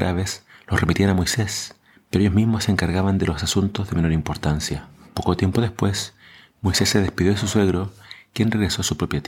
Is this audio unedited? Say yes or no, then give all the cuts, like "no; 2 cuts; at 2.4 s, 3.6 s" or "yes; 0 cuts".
yes; 0 cuts